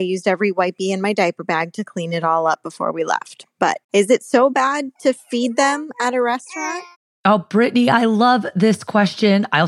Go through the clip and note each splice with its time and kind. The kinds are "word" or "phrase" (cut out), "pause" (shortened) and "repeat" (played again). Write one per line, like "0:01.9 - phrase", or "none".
0:03.8 - pause